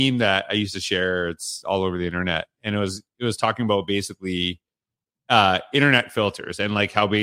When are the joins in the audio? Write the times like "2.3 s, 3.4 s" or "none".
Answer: none